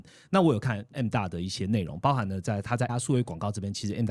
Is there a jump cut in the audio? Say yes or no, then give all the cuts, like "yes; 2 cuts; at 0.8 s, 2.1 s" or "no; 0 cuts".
yes; 1 cut; at 2.9 s